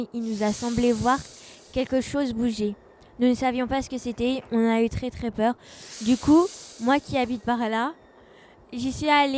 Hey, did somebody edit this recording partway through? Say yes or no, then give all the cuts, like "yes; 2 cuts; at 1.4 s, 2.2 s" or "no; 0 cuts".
no; 0 cuts